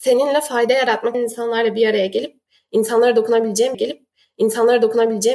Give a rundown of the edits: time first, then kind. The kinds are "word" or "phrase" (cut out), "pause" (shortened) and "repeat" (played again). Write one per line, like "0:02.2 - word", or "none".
0:01.1 - word
0:03.7 - repeat

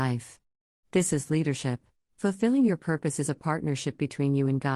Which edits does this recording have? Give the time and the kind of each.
0:02.0 - pause

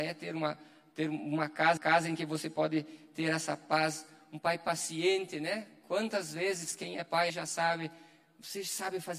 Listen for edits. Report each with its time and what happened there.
0:01.8 - repeat
0:07.3 - word

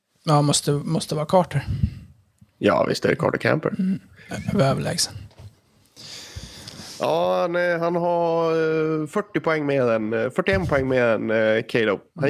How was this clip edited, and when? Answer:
none

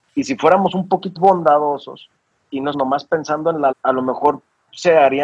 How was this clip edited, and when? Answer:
0:01.2 - word
0:02.3 - word
0:02.7 - word
0:03.7 - word

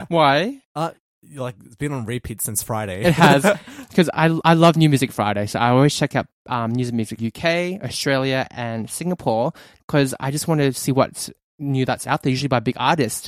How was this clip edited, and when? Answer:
0:07.2 - word

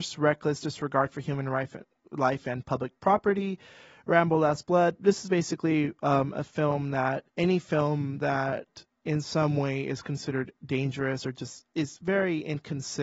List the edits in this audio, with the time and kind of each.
0:03.0 - pause
0:07.3 - pause

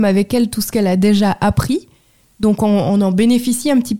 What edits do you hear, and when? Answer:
none

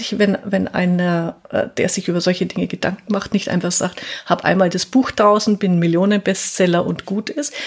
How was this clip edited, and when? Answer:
none

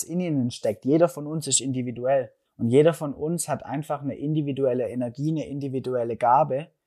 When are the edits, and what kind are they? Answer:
0:02.5 - pause

